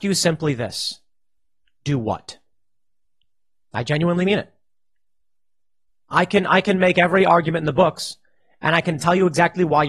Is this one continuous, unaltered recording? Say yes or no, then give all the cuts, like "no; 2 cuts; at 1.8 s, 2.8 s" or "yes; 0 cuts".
yes; 0 cuts